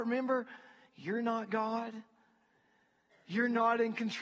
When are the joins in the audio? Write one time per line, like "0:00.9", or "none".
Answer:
none